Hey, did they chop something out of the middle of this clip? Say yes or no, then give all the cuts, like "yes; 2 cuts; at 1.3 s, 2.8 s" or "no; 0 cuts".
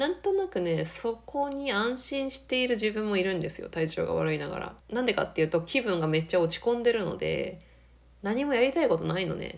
yes; 1 cut; at 4.8 s